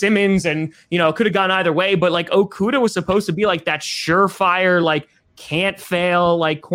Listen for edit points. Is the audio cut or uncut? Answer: uncut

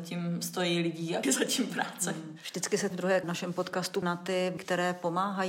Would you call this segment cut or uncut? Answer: cut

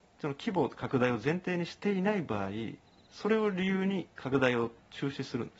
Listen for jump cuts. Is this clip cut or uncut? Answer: cut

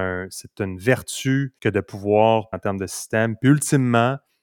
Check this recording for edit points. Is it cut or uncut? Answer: cut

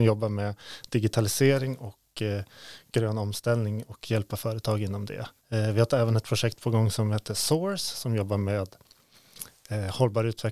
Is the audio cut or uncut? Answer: cut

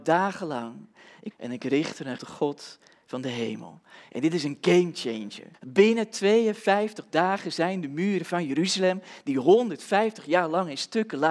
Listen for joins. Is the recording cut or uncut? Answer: cut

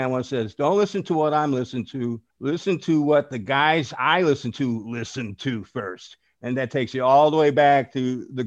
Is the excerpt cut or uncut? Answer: cut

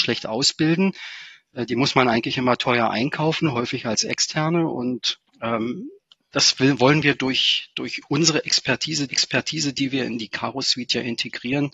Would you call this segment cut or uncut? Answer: cut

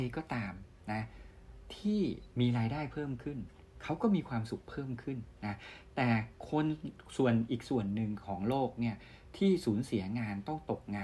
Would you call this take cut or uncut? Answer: cut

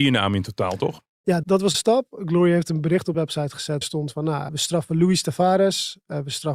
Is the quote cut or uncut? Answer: cut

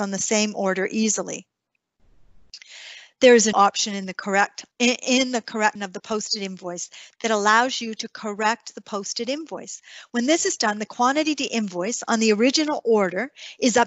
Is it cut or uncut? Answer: cut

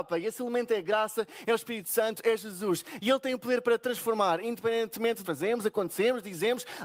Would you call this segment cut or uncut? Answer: cut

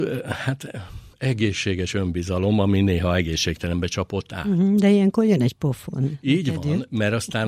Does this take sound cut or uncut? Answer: uncut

